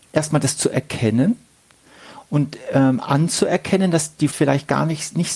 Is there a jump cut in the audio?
yes; 1 cut; at 4.3 s

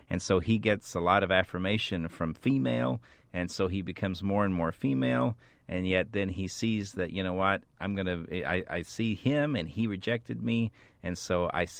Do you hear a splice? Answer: no; 0 cuts

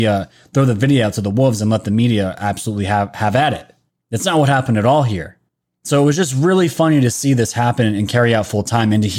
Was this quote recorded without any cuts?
no; 2 cuts; at 3.9 s, 5.5 s

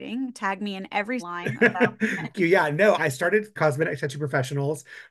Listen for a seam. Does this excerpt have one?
yes; 4 cuts; at 1.2 s, 2.3 s, 3.0 s, 3.6 s

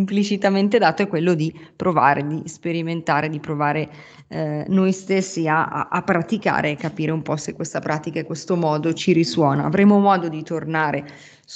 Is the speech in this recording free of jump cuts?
no; 1 cut; at 8.9 s

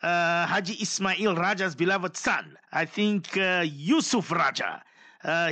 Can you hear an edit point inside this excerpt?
yes; 1 cut; at 2.6 s

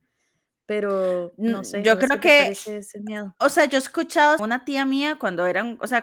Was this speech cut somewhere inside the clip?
yes; 1 cut; at 4.4 s

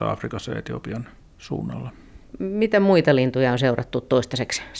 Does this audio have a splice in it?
no; 0 cuts

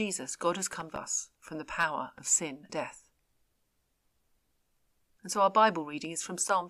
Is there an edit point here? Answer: yes; 2 cuts; at 0.9 s, 2.7 s

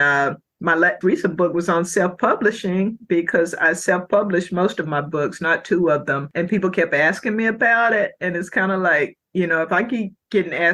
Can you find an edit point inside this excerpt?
yes; 1 cut; at 1.0 s

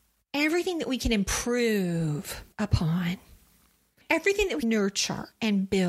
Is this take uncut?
no; 2 cuts; at 2.5 s, 4.6 s

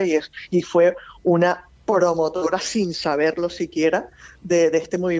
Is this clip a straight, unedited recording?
yes; 0 cuts

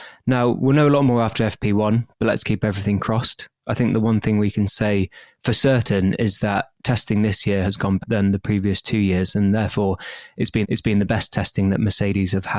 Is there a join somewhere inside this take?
yes; 3 cuts; at 6.7 s, 8.0 s, 10.6 s

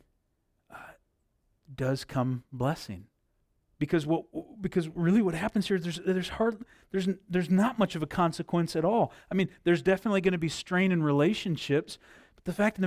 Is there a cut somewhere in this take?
no; 0 cuts

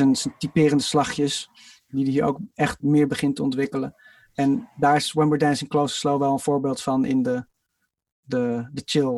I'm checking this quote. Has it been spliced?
no; 0 cuts

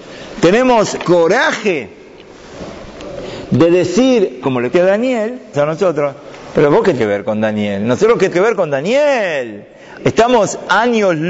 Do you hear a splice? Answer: yes; 6 cuts; at 1.0 s, 4.4 s, 4.7 s, 5.5 s, 7.0 s, 8.3 s

